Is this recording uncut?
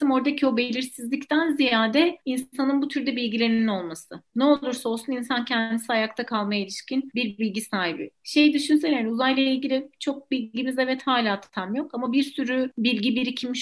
yes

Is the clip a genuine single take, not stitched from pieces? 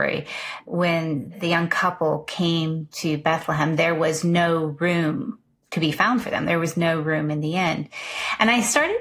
yes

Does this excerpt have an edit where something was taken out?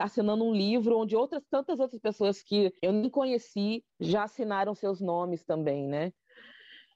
yes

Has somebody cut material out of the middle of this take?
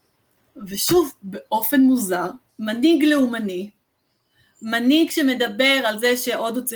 no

